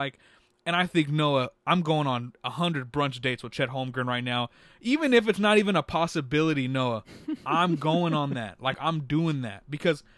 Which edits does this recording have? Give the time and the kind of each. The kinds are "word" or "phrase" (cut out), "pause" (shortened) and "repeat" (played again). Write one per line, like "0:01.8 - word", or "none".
none